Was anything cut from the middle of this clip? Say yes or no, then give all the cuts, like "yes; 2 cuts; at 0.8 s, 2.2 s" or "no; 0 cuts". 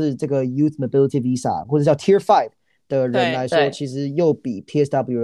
no; 0 cuts